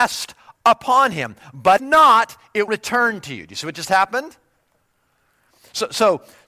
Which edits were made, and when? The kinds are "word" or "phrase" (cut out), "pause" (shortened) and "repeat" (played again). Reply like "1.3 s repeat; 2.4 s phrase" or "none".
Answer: 1.8 s word; 2.7 s word